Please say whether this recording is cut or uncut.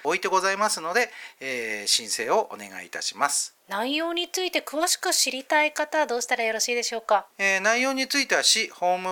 cut